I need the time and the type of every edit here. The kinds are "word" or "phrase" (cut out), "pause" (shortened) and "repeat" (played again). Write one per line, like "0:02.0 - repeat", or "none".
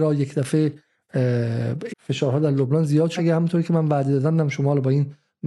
0:01.9 - word
0:03.2 - word